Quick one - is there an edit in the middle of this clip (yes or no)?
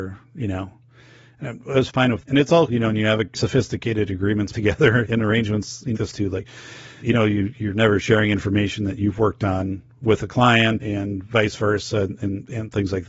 yes